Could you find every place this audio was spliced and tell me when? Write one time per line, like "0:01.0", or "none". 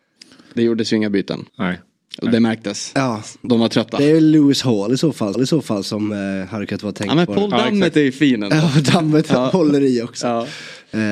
0:01.5
0:05.3